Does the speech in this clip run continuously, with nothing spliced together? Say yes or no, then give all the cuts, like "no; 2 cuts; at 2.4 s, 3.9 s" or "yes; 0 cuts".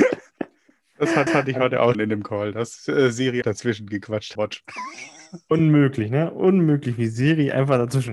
no; 4 cuts; at 1.3 s, 1.9 s, 3.4 s, 4.3 s